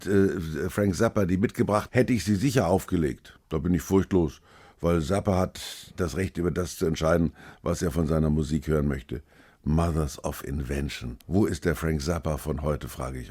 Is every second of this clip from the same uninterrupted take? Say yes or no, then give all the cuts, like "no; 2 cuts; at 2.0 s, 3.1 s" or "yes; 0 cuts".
no; 3 cuts; at 1.9 s, 3.4 s, 11.2 s